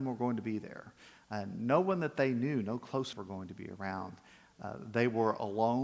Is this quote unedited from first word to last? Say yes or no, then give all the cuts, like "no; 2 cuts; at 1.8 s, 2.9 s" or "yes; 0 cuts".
no; 1 cut; at 3.1 s